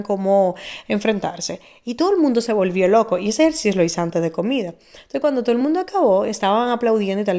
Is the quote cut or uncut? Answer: uncut